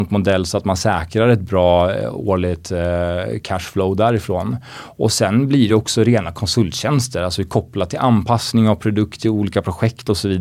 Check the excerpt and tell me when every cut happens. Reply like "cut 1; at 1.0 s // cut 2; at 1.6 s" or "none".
none